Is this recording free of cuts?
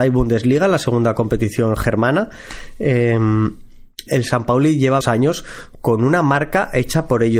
no; 2 cuts; at 4.1 s, 5.0 s

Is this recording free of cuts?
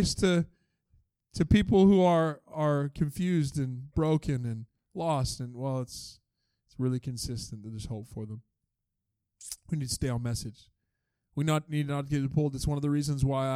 yes; 0 cuts

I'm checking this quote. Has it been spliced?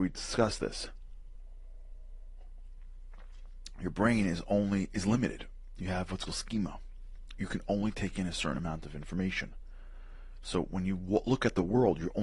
yes; 1 cut; at 6.3 s

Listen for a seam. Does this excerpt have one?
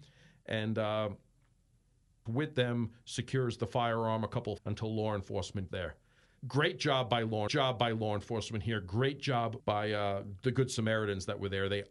yes; 6 cuts; at 2.3 s, 4.6 s, 5.7 s, 6.4 s, 7.5 s, 9.6 s

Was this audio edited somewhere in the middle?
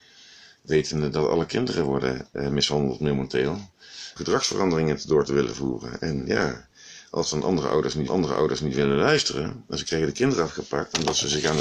yes; 2 cuts; at 4.2 s, 8.1 s

